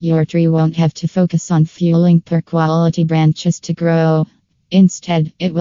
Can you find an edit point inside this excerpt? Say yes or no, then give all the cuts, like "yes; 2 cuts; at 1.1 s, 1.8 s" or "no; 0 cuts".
no; 0 cuts